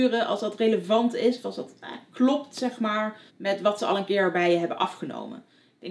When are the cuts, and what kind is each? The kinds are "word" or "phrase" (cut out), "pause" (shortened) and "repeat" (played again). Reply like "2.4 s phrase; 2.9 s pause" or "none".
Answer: 3.3 s pause